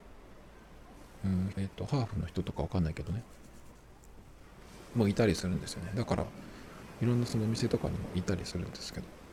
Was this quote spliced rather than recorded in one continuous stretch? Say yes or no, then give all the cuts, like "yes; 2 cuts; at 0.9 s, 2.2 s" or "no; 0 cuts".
yes; 1 cut; at 1.5 s